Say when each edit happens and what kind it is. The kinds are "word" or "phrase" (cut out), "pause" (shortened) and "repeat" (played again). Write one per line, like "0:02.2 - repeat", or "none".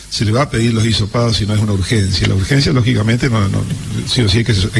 none